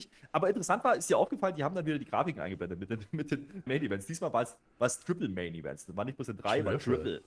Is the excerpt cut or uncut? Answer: cut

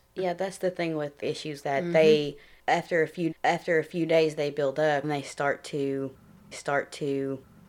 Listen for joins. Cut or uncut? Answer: cut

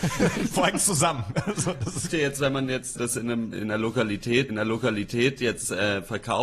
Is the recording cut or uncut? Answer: cut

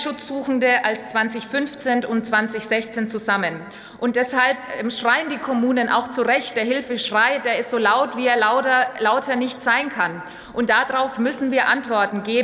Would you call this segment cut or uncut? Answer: uncut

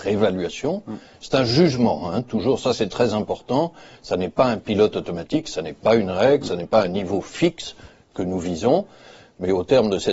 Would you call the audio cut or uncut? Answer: uncut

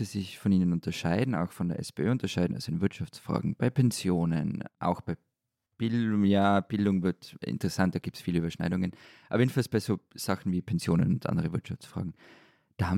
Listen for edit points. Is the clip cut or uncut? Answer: uncut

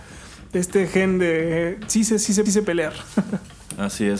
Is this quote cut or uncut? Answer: cut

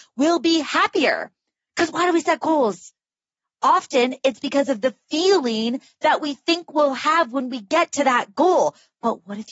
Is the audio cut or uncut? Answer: uncut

